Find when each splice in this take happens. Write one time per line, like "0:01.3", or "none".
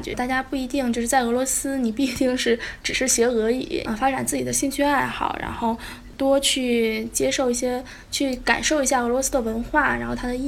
0:03.8